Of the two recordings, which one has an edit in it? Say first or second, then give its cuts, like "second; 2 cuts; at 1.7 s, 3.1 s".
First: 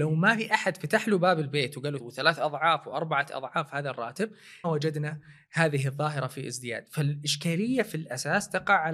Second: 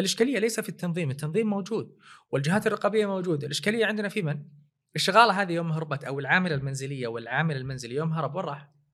first; 2 cuts; at 2.0 s, 4.6 s